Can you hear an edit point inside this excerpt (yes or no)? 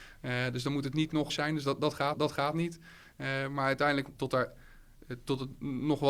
yes